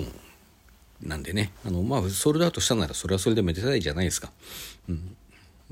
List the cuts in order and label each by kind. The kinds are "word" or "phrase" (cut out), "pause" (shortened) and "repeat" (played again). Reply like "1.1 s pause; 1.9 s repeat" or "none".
1.5 s pause